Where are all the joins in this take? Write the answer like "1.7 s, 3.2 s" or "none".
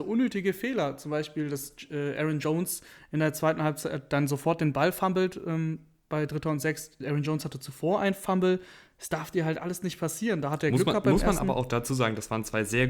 none